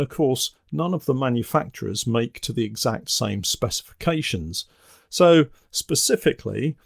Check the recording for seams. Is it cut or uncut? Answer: uncut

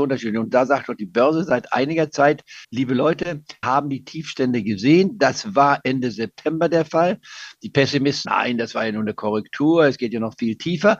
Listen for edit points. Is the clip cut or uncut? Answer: cut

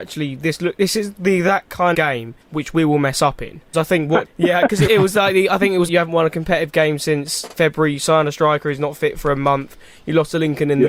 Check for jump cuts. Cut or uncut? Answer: cut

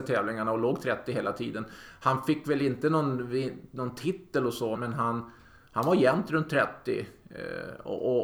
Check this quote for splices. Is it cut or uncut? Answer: cut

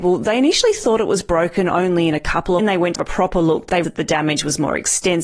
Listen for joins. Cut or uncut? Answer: cut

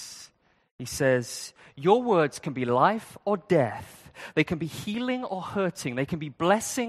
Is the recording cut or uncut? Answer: uncut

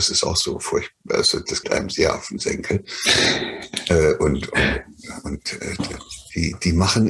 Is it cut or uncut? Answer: cut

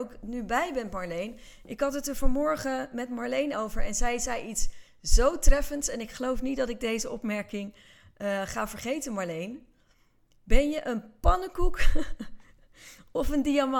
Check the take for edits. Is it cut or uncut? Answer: uncut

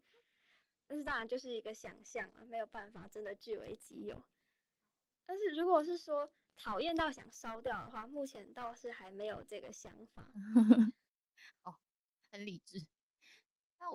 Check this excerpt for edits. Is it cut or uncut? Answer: uncut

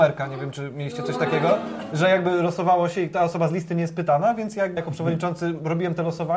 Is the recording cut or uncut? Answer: cut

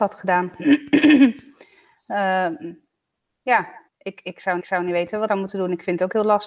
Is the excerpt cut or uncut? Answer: cut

